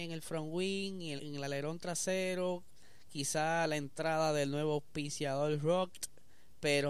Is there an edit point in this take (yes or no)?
yes